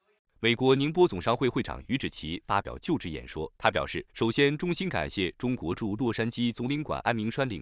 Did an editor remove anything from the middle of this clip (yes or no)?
yes